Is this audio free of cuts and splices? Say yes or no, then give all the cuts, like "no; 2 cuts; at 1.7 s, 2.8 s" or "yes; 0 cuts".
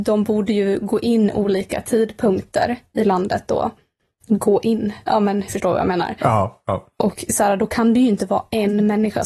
no; 1 cut; at 5.5 s